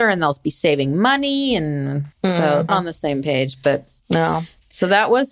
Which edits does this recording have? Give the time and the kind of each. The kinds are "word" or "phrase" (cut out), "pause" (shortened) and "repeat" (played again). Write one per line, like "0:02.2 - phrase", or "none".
0:02.1 - pause
0:02.7 - phrase